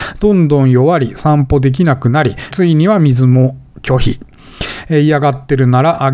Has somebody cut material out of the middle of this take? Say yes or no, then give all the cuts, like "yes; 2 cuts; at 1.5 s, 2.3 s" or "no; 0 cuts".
yes; 1 cut; at 2.5 s